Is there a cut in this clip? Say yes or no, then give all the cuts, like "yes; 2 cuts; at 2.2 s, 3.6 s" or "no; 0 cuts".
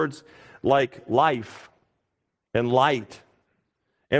no; 0 cuts